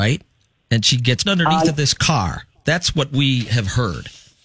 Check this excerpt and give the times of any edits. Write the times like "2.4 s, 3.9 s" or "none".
1.3 s